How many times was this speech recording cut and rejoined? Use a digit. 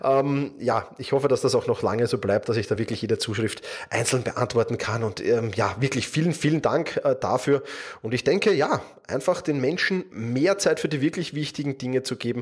0